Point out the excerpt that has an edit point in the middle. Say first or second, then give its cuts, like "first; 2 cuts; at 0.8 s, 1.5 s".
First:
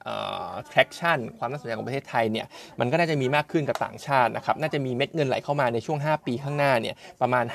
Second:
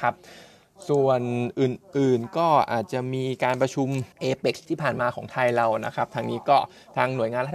second; 1 cut; at 4.1 s